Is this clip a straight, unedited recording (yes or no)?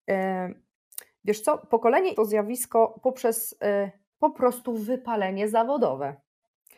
no